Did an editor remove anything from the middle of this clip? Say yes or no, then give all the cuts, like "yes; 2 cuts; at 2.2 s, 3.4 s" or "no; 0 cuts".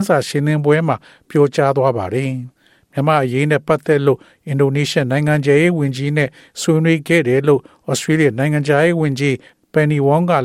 no; 0 cuts